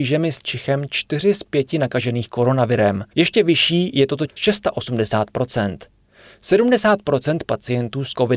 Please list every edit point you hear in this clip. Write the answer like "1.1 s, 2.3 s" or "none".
3.1 s, 4.3 s